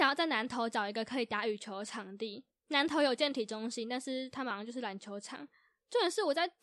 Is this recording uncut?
yes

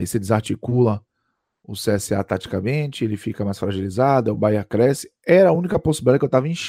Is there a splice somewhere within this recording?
no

